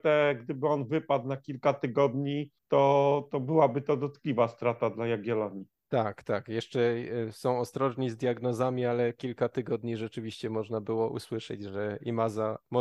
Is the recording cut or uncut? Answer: cut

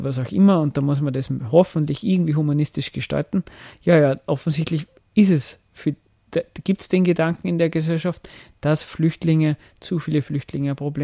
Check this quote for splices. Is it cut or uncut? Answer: uncut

